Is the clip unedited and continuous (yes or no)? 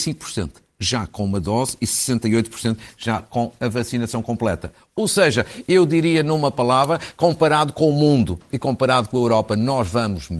yes